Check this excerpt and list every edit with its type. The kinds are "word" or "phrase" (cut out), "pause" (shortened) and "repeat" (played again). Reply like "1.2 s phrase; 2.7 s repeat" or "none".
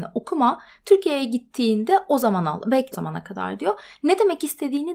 2.9 s word